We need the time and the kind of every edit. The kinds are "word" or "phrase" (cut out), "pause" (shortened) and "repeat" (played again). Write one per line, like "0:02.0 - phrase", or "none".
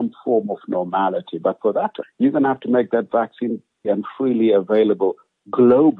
0:02.0 - word
0:03.8 - word

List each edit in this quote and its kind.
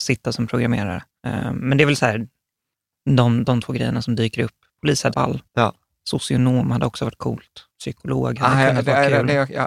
0:01.1 - pause
0:05.1 - phrase
0:05.5 - pause
0:07.7 - pause

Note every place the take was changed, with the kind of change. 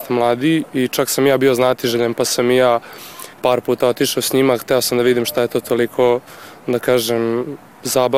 0:03.3 - pause

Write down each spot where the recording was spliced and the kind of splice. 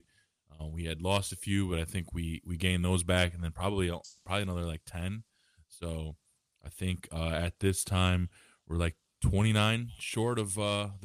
none

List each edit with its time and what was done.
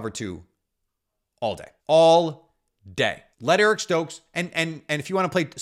0:01.8 - pause
0:03.3 - pause

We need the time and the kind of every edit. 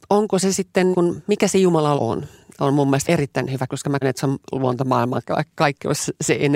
0:00.9 - word
0:02.0 - word
0:03.0 - word
0:03.7 - word
0:04.0 - word

